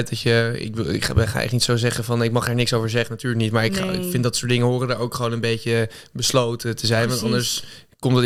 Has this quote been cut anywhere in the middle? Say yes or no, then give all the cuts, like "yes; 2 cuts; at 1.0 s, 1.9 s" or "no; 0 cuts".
no; 0 cuts